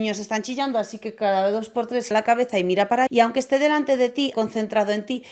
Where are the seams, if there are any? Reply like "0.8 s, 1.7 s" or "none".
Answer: 2.1 s, 3.1 s, 4.3 s